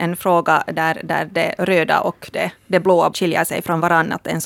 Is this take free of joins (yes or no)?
no